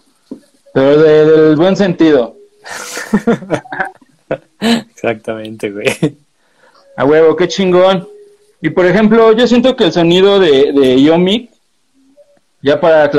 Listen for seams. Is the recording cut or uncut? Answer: uncut